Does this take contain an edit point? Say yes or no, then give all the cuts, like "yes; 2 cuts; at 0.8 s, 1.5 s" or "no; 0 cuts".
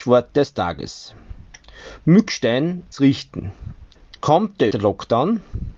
yes; 3 cuts; at 2.9 s, 4.0 s, 4.7 s